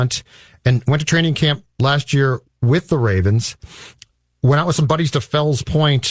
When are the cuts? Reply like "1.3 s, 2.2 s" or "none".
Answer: none

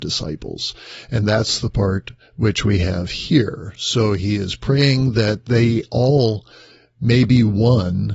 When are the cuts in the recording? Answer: none

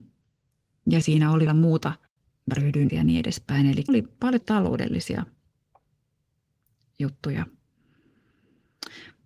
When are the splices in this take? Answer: 1.0 s, 1.5 s, 2.9 s, 3.9 s, 4.4 s

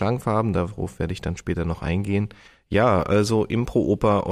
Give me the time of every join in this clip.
2.5 s

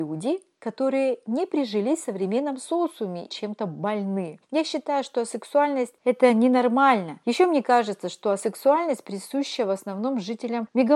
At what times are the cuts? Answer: 3.3 s, 4.4 s

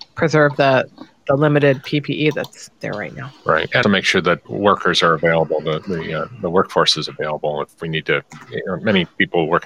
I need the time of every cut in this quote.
2.8 s, 3.8 s, 4.4 s

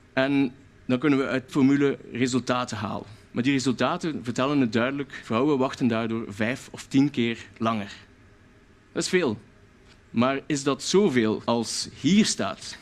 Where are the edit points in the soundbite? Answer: 1.5 s

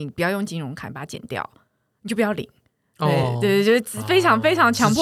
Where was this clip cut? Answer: none

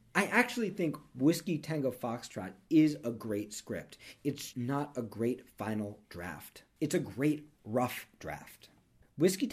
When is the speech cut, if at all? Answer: 4.5 s

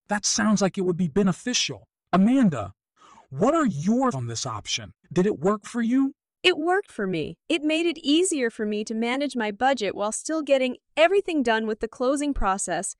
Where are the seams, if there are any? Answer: 4.1 s, 5.0 s, 5.6 s, 6.2 s, 6.9 s, 7.4 s

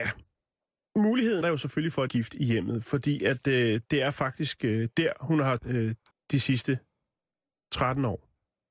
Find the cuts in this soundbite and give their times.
1.4 s, 2.1 s, 5.6 s, 6.1 s

